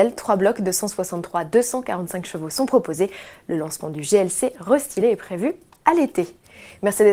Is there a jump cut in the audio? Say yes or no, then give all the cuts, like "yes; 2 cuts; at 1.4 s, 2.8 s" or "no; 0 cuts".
no; 0 cuts